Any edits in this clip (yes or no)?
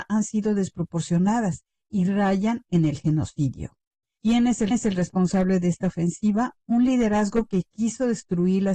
yes